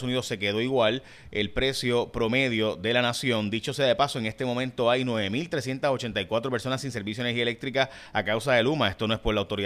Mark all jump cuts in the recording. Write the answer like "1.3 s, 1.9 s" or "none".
none